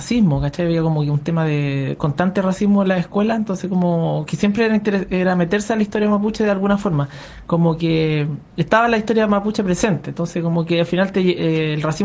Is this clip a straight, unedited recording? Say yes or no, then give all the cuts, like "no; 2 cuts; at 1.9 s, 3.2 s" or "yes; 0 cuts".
yes; 0 cuts